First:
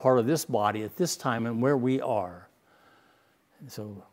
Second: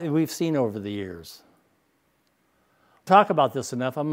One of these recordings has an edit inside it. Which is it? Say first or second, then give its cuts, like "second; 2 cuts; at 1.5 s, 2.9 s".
second; 1 cut; at 3.1 s